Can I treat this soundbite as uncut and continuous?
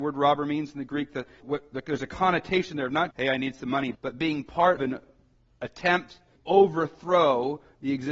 no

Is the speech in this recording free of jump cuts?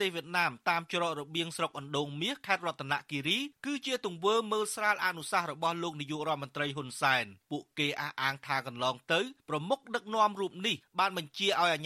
no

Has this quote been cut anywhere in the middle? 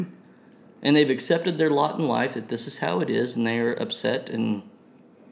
no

